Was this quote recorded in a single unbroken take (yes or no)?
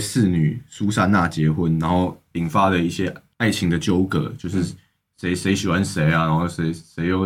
yes